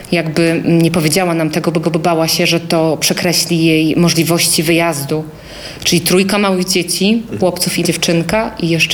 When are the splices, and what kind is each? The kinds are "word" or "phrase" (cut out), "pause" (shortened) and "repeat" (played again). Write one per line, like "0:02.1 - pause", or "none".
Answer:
0:01.8 - repeat
0:07.4 - word
0:07.8 - word